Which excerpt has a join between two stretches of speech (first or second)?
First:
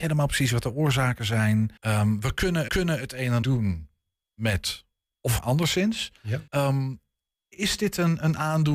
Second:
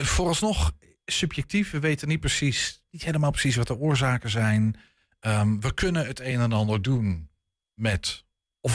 first